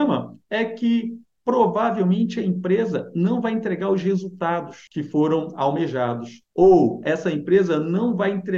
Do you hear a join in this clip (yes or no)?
no